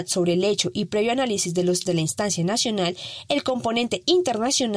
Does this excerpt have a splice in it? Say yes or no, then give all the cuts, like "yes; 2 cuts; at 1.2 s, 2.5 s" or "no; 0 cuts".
yes; 1 cut; at 1.9 s